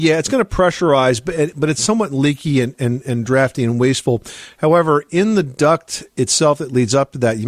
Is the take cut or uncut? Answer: uncut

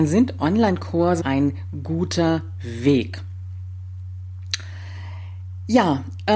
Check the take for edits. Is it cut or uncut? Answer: cut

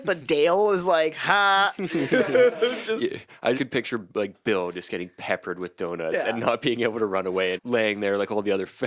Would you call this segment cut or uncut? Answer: cut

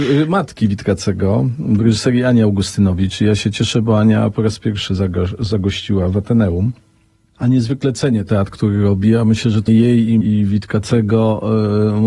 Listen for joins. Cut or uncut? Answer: cut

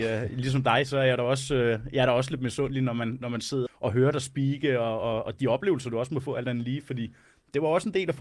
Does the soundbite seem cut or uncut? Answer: cut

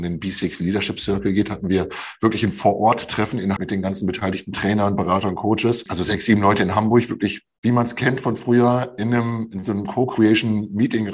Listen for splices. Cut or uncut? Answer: cut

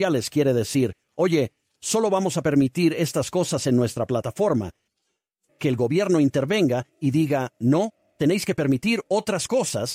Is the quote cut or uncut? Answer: uncut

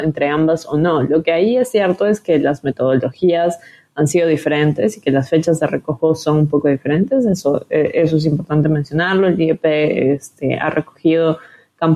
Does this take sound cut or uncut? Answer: uncut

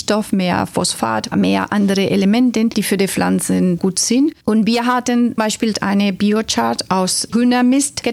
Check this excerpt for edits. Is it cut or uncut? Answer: cut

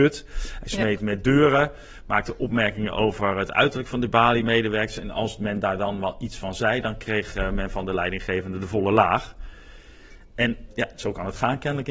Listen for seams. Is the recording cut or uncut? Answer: uncut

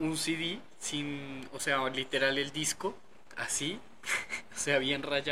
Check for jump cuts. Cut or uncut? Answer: uncut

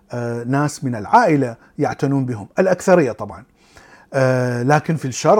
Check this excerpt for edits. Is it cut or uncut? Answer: uncut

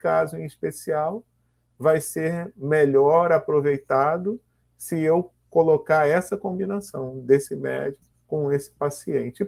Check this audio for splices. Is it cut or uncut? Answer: cut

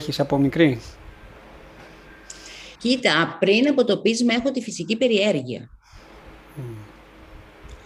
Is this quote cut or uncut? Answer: cut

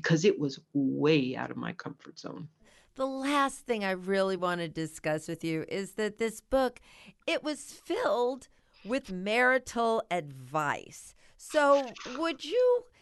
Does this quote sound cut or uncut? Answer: uncut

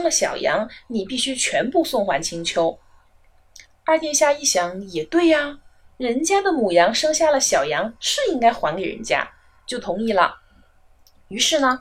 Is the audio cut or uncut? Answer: uncut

